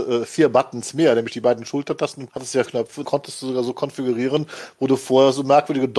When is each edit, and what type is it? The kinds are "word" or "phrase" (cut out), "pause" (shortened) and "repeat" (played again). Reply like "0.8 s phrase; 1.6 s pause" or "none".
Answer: 2.3 s word; 2.6 s word; 3.0 s word

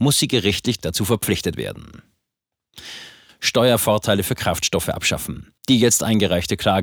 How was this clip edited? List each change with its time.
5.6 s pause

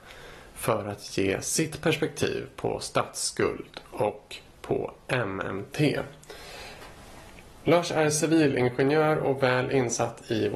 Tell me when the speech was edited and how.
none

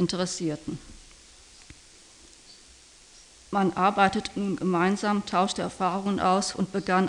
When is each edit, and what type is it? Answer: none

